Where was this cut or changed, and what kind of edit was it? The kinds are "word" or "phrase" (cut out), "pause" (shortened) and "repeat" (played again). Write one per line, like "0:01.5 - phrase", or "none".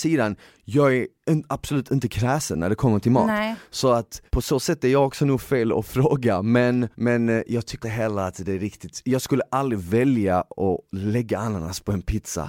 0:04.3 - pause
0:06.9 - pause
0:07.8 - word